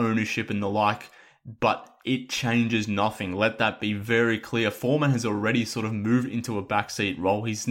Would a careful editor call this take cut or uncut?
uncut